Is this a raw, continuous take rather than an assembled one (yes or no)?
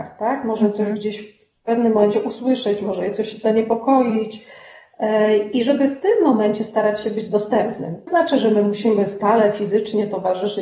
no